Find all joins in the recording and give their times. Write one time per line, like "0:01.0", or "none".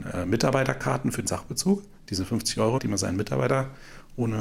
0:01.3
0:02.8

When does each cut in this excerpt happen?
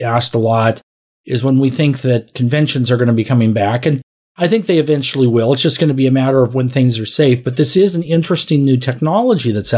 none

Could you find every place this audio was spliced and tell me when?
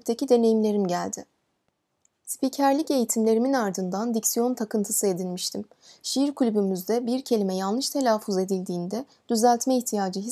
none

